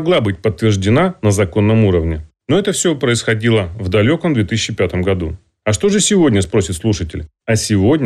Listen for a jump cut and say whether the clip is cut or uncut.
uncut